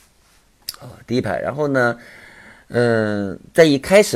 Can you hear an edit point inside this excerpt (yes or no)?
no